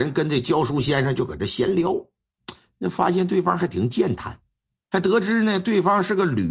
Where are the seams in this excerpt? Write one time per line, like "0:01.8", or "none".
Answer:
0:04.7